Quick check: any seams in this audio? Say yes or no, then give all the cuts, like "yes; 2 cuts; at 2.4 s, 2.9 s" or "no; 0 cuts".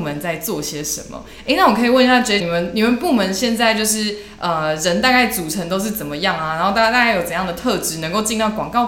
yes; 1 cut; at 2.4 s